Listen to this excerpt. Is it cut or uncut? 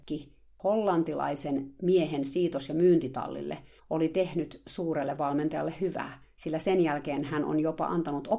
cut